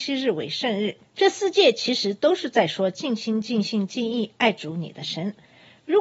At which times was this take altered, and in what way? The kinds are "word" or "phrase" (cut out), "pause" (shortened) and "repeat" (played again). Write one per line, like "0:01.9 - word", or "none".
0:01.0 - pause